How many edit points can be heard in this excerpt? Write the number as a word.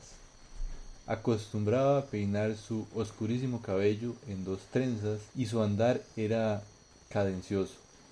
one